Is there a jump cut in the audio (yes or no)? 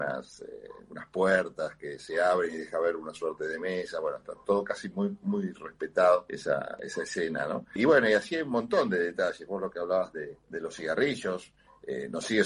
yes